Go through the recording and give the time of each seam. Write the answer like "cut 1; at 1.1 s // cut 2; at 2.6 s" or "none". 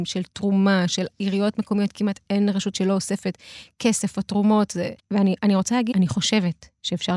cut 1; at 2.2 s // cut 2; at 2.7 s // cut 3; at 5.0 s // cut 4; at 5.9 s